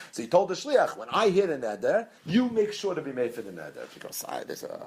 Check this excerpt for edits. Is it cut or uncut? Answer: cut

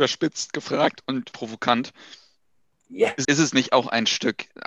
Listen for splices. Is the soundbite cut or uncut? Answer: cut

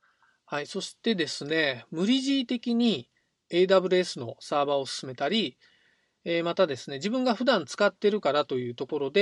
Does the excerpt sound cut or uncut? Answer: uncut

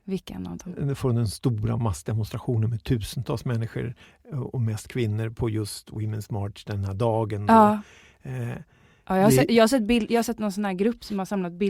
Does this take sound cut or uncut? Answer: uncut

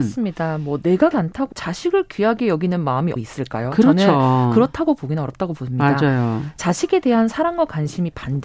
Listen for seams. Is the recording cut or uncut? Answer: cut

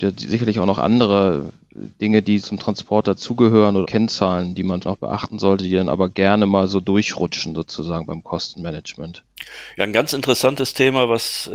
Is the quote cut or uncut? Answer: cut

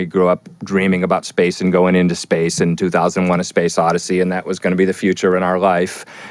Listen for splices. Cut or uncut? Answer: uncut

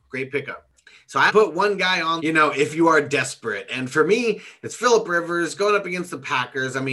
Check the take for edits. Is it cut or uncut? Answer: cut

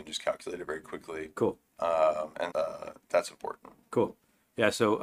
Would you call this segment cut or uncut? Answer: cut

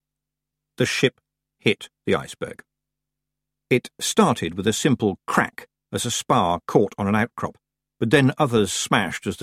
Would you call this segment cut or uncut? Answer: uncut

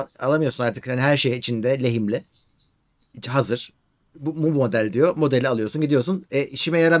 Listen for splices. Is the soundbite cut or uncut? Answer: uncut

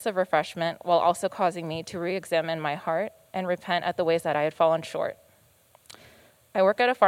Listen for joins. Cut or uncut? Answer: uncut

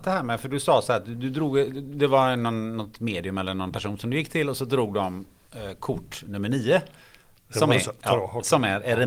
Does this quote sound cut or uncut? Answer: uncut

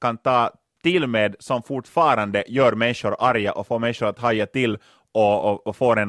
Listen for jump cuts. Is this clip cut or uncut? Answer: uncut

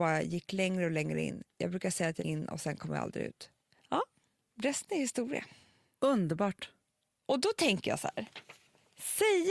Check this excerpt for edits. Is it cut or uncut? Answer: cut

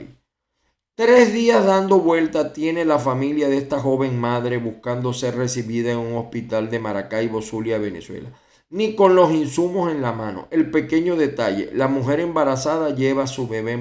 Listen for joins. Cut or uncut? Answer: uncut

